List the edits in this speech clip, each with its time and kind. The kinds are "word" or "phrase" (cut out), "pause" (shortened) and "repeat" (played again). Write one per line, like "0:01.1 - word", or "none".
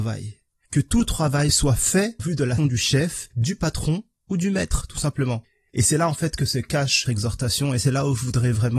0:02.2 - word
0:02.6 - word
0:07.1 - word